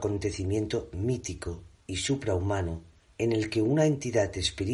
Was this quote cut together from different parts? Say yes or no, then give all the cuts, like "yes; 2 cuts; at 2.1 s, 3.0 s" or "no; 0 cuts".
yes; 1 cut; at 3.0 s